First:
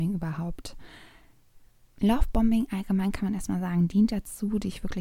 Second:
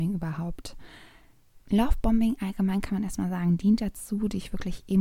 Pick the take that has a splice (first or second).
second